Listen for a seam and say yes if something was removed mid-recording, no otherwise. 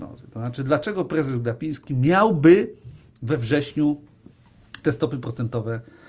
no